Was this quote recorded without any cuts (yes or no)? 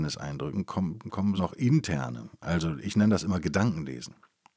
no